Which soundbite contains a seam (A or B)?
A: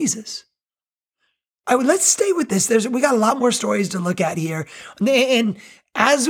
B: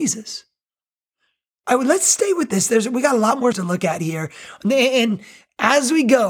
B